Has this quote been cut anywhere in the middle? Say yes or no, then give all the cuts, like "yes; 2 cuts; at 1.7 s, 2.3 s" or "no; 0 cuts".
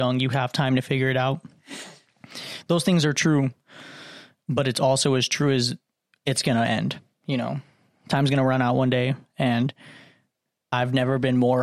no; 0 cuts